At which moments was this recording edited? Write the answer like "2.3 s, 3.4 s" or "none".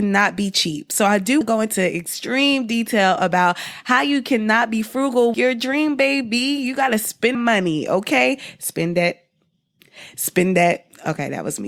1.4 s, 5.3 s, 7.3 s